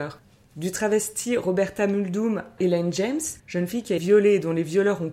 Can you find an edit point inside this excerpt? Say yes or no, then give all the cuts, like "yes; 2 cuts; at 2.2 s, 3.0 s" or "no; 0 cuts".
yes; 3 cuts; at 2.6 s, 3.4 s, 4.0 s